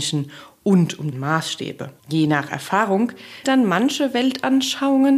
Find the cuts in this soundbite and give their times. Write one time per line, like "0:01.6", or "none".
0:01.1
0:02.0
0:03.4